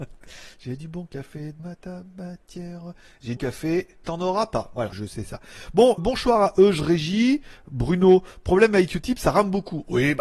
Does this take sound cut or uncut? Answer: cut